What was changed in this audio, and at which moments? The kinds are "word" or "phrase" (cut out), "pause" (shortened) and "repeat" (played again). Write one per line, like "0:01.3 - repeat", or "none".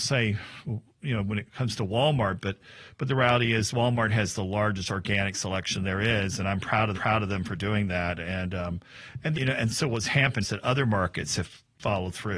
0:06.9 - repeat
0:09.3 - word
0:10.4 - word

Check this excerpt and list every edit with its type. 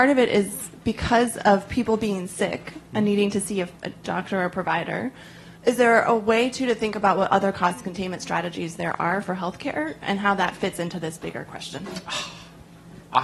0:03.8 - pause
0:05.6 - pause

